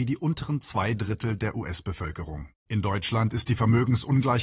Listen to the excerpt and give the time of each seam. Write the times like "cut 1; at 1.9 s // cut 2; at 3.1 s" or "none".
cut 1; at 2.6 s